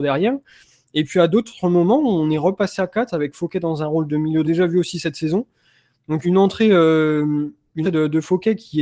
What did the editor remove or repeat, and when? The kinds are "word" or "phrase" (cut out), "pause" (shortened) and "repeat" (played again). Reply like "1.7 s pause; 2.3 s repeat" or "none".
4.4 s phrase; 6.2 s word; 7.8 s word